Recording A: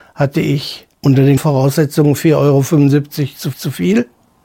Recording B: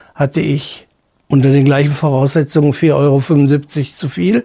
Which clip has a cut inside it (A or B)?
A